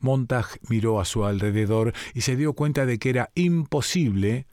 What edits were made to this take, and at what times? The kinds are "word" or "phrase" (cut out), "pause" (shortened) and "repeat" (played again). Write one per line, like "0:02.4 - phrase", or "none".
none

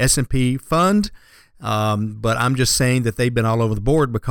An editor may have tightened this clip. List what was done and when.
none

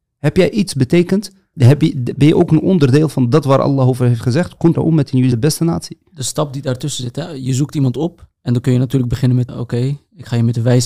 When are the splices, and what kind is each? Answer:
0:01.5 - word
0:04.7 - word
0:05.3 - word
0:08.4 - pause
0:09.5 - word

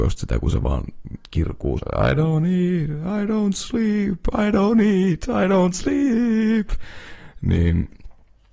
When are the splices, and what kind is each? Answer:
0:01.8 - word

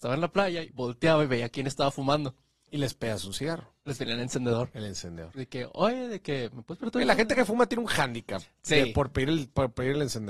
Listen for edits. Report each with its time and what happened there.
none

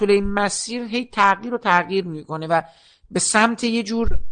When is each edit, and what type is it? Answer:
none

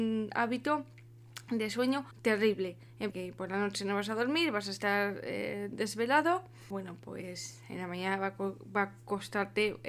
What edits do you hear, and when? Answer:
0:02.1 - pause
0:03.1 - phrase
0:06.7 - phrase

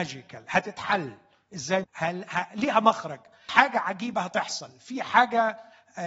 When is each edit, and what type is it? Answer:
0:01.8 - word
0:02.5 - phrase
0:03.5 - word

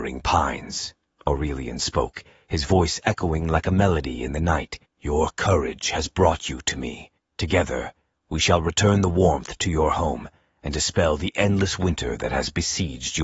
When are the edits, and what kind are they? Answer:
0:04.8 - pause
0:07.2 - pause

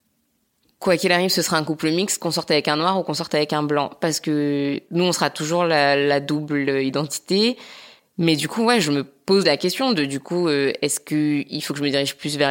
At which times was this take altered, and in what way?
none

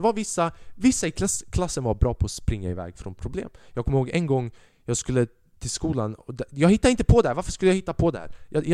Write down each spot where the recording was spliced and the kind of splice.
none

